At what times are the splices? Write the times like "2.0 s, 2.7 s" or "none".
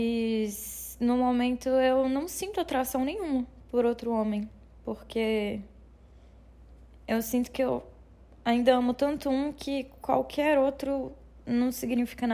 none